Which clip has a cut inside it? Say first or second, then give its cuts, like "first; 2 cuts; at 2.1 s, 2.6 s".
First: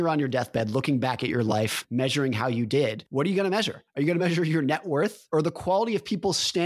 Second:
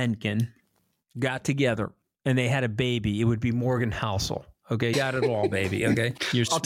second; 1 cut; at 4.9 s